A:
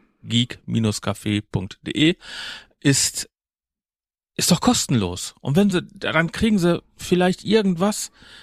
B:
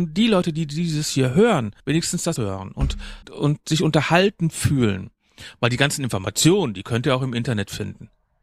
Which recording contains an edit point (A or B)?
B